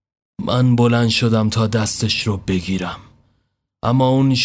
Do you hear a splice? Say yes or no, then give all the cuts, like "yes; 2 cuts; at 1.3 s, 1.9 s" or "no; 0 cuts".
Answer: no; 0 cuts